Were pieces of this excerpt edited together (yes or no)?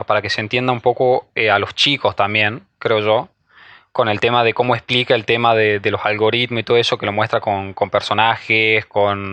no